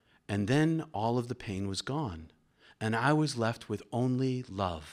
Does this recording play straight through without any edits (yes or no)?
yes